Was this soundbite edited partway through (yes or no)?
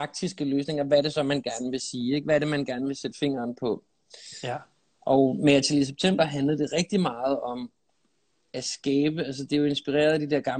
no